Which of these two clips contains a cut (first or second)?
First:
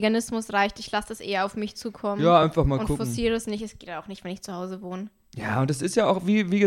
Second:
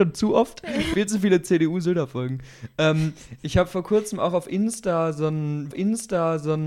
second